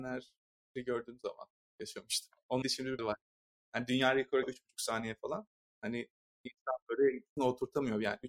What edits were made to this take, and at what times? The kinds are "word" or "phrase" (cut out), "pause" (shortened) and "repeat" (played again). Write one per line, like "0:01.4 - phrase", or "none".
0:02.6 - word
0:03.0 - word
0:04.4 - word
0:05.6 - pause
0:07.4 - word